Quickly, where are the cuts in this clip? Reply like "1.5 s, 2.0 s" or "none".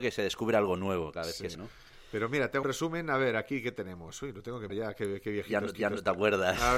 1.5 s, 2.6 s, 4.7 s, 5.7 s